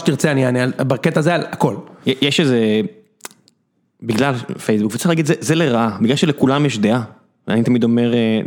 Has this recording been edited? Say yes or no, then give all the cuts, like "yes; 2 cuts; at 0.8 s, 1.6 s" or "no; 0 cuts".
no; 0 cuts